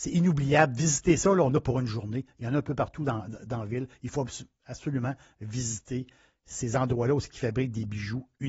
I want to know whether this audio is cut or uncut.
uncut